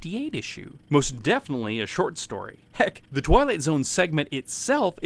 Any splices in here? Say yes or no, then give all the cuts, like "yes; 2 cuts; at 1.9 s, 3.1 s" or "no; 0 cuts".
no; 0 cuts